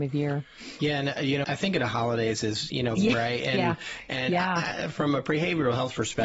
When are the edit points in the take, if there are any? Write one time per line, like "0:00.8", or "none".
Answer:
0:01.4
0:03.0